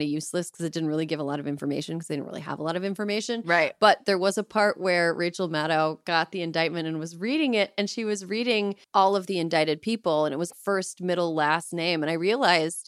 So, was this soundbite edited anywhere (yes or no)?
yes